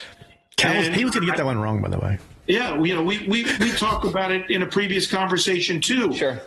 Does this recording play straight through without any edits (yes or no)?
yes